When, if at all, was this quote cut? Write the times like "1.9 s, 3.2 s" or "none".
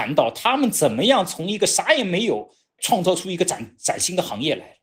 2.8 s